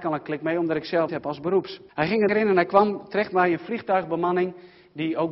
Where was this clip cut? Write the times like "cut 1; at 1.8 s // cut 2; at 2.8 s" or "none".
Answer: cut 1; at 1.1 s // cut 2; at 1.9 s // cut 3; at 2.3 s